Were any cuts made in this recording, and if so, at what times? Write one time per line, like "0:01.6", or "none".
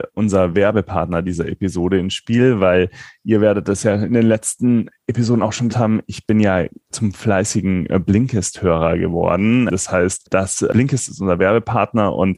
0:05.7
0:06.9